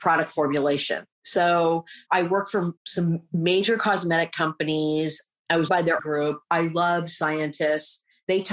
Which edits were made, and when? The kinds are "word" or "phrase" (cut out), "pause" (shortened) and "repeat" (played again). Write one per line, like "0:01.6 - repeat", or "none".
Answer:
0:01.1 - pause
0:02.8 - pause
0:05.7 - word
0:06.0 - phrase